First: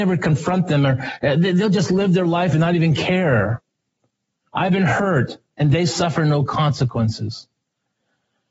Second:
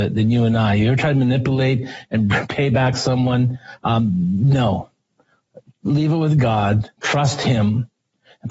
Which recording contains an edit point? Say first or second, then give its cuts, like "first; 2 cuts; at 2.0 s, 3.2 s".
second; 1 cut; at 6.9 s